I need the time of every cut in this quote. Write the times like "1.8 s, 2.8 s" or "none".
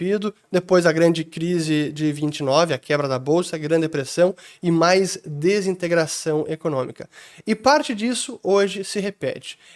none